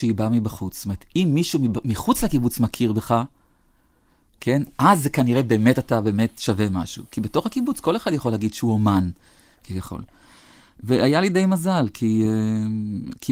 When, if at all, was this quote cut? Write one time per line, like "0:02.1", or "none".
none